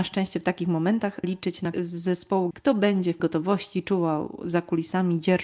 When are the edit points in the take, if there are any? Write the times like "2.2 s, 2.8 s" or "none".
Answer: 1.2 s, 1.7 s, 2.5 s, 3.2 s